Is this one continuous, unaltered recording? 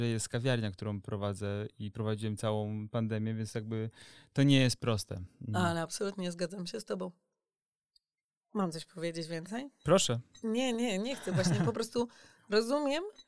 yes; 0 cuts

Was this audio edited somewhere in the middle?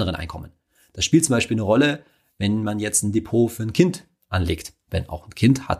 no; 0 cuts

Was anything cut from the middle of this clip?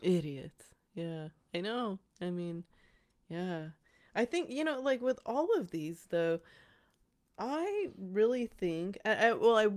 no; 0 cuts

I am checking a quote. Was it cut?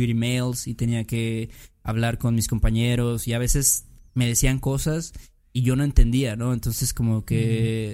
no; 0 cuts

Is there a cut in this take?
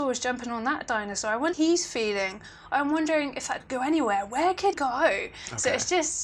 yes; 3 cuts; at 1.5 s, 3.6 s, 4.7 s

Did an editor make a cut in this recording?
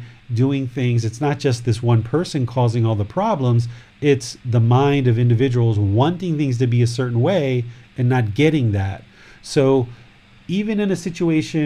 no; 0 cuts

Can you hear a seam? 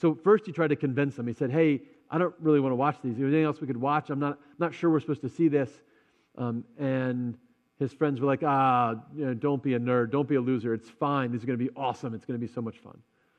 no; 0 cuts

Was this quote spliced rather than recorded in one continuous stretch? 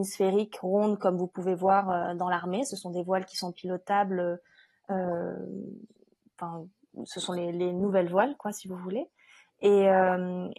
no; 0 cuts

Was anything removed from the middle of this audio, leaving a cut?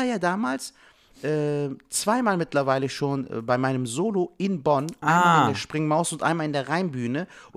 no; 0 cuts

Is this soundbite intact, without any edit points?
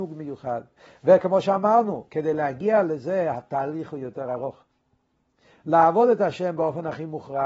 yes; 0 cuts

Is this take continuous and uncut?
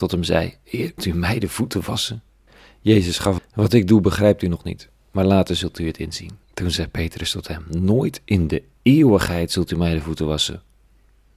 no; 4 cuts; at 1.0 s, 2.5 s, 3.4 s, 6.4 s

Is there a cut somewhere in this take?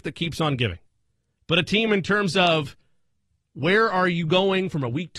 no; 0 cuts

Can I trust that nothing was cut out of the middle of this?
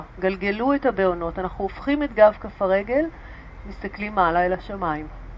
yes; 0 cuts

